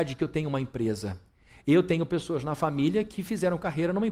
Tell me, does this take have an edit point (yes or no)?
no